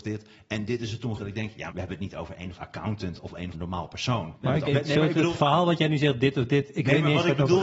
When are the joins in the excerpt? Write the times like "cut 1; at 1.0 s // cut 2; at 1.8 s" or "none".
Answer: cut 1; at 1.2 s // cut 2; at 1.7 s // cut 3; at 2.6 s // cut 4; at 3.5 s // cut 5; at 4.4 s // cut 6; at 4.7 s